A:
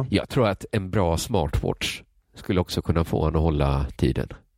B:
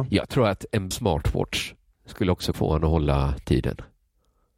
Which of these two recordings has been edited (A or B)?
B